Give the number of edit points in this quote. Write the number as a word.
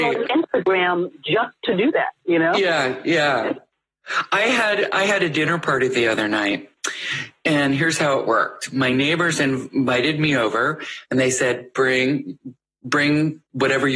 zero